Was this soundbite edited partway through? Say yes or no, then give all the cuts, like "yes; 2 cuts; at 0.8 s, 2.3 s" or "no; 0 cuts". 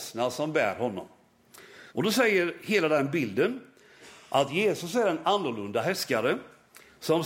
yes; 1 cut; at 1.9 s